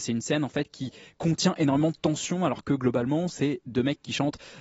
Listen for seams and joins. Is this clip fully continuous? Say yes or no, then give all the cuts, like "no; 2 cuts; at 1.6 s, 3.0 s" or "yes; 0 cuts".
yes; 0 cuts